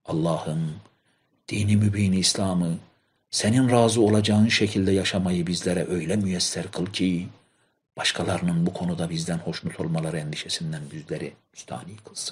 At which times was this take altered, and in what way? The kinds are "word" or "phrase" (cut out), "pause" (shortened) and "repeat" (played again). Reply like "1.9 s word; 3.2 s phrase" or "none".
none